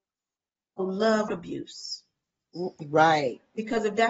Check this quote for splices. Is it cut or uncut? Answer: cut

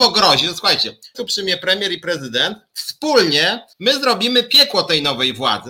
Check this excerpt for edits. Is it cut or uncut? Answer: cut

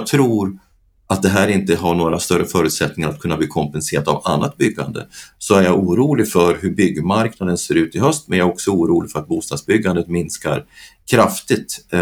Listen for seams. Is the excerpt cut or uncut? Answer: uncut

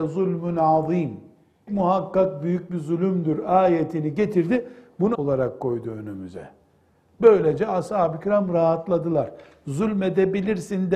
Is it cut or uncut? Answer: cut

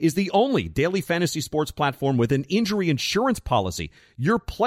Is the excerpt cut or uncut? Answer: uncut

